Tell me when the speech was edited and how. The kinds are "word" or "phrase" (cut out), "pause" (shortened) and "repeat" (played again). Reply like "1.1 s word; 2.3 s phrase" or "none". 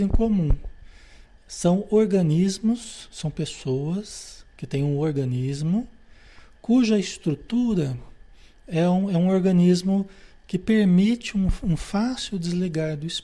none